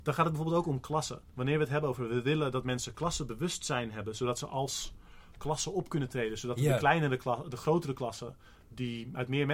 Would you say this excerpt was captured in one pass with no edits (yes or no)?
yes